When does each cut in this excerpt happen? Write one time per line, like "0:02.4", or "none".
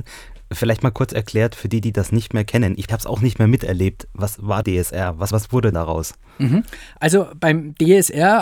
0:02.9
0:04.6
0:05.3
0:05.7

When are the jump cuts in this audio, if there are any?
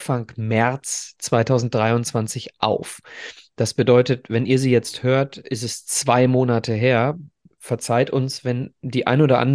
none

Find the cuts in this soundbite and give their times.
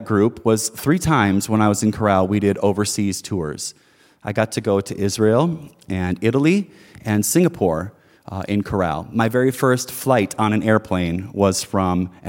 none

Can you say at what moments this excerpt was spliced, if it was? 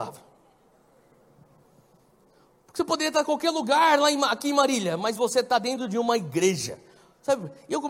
none

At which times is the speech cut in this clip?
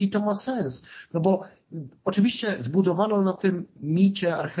none

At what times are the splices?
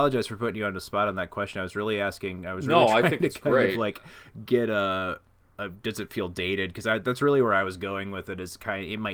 none

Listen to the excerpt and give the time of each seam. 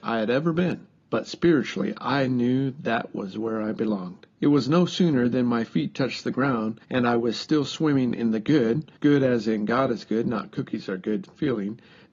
0:01.0
0:04.3
0:06.8
0:09.0

